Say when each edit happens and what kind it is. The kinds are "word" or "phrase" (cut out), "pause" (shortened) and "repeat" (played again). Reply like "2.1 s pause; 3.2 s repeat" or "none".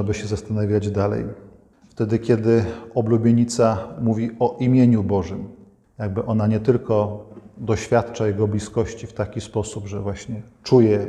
none